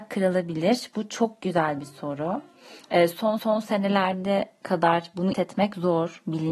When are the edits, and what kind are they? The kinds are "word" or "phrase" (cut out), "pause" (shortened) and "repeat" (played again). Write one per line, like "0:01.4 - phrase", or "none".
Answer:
0:03.4 - repeat
0:05.3 - word